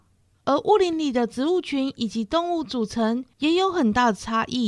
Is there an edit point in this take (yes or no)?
yes